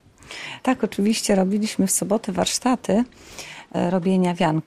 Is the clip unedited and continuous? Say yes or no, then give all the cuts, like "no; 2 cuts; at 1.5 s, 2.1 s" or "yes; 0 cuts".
yes; 0 cuts